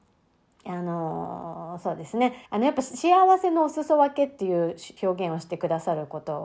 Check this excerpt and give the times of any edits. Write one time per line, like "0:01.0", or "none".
0:02.5
0:05.0